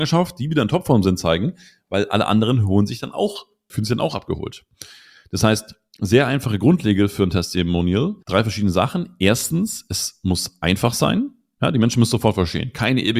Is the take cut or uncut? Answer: cut